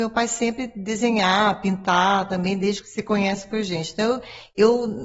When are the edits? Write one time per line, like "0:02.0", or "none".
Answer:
0:02.8